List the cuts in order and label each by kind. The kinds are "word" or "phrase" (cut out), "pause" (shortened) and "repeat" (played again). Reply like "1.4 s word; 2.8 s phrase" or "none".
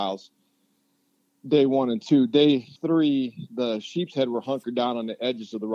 2.8 s pause